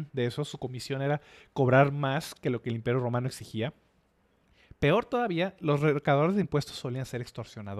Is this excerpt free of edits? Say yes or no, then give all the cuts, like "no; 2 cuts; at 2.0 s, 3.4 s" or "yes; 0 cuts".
yes; 0 cuts